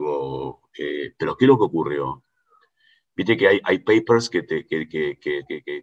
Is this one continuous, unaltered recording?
yes; 0 cuts

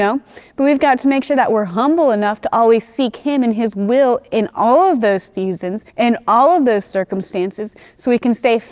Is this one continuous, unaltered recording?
no; 1 cut; at 5.9 s

